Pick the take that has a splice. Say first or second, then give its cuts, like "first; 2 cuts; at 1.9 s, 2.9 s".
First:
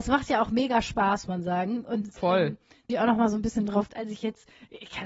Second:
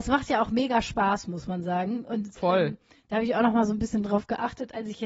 first; 3 cuts; at 1.3 s, 2.9 s, 3.9 s